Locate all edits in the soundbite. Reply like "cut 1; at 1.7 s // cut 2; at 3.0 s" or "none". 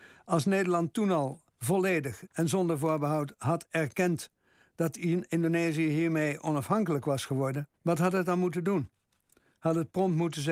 cut 1; at 1.5 s // cut 2; at 7.8 s